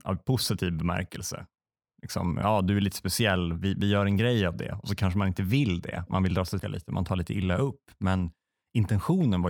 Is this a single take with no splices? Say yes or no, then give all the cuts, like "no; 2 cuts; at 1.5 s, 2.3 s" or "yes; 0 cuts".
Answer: no; 1 cut; at 6.6 s